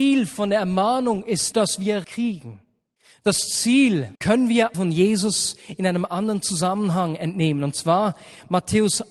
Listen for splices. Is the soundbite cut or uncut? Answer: cut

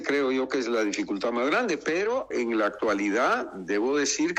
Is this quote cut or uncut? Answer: uncut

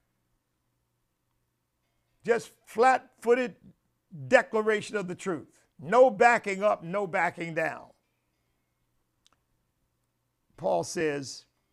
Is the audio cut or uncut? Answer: cut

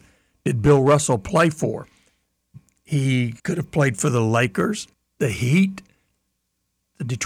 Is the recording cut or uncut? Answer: cut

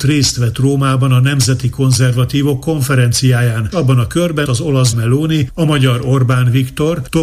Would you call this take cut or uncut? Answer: cut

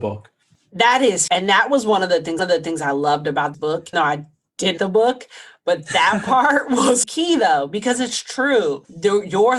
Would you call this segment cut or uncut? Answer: cut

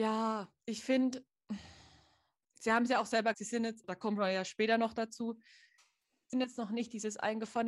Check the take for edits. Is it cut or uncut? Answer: cut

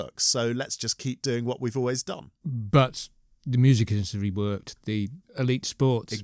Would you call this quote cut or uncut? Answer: uncut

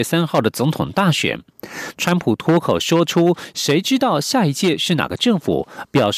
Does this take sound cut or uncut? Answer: uncut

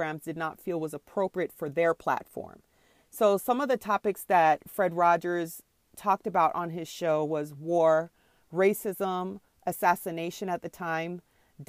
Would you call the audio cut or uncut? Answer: uncut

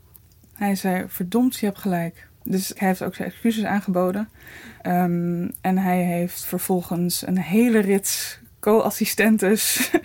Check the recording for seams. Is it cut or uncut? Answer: cut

